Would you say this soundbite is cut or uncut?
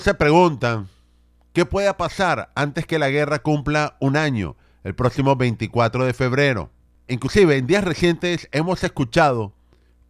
uncut